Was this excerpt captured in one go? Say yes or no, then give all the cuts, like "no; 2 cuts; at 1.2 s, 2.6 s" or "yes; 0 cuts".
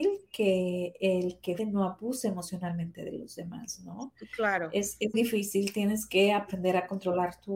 no; 2 cuts; at 1.6 s, 5.1 s